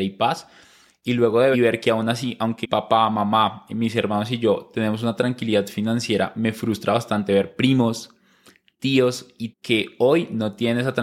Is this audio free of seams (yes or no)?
no